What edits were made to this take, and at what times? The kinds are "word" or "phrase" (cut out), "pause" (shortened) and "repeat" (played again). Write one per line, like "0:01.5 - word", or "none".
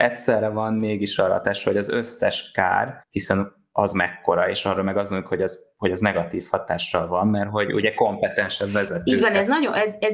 0:03.0 - pause